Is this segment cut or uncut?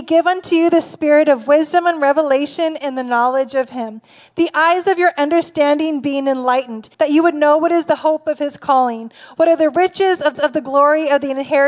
cut